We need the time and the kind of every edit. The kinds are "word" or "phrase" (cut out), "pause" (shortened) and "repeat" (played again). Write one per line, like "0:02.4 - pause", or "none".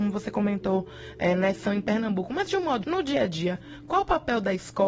0:01.7 - word
0:02.8 - word